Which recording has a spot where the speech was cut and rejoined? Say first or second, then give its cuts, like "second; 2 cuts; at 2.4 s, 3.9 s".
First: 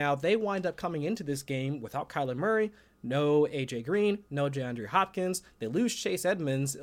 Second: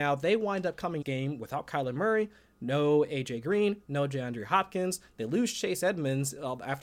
second; 1 cut; at 1.0 s